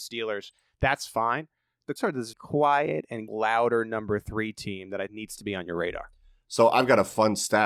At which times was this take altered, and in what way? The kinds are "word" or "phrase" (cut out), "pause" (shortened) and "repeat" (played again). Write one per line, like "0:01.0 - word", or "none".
0:02.0 - word
0:02.3 - word
0:03.3 - word
0:05.1 - word